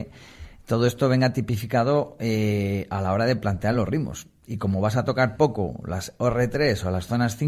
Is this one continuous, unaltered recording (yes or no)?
yes